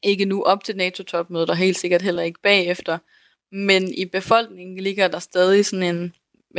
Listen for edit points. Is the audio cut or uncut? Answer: uncut